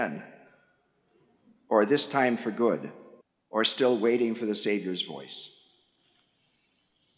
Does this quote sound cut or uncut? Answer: cut